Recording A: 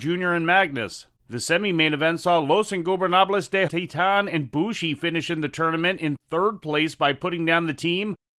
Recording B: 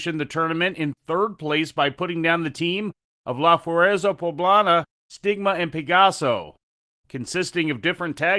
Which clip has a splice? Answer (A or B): A